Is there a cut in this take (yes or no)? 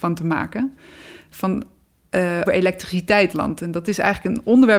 yes